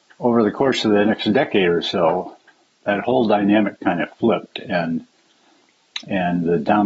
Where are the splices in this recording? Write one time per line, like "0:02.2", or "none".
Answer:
none